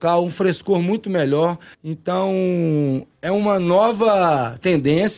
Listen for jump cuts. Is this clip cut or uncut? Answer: cut